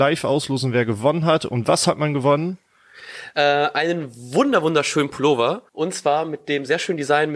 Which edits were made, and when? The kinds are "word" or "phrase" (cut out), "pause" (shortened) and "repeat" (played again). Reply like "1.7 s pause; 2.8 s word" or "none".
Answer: 5.7 s pause